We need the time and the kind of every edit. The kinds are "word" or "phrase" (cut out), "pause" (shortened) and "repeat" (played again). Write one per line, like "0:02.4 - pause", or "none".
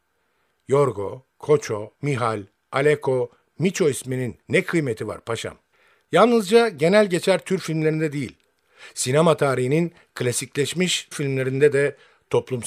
0:02.0 - pause
0:04.4 - pause
0:05.7 - pause
0:11.1 - phrase